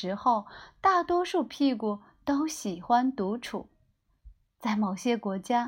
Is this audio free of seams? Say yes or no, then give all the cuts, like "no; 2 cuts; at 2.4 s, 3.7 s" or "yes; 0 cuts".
yes; 0 cuts